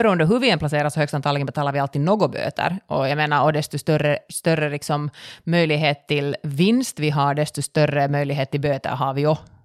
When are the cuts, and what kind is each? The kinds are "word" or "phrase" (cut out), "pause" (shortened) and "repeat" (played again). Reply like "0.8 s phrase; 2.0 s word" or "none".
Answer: none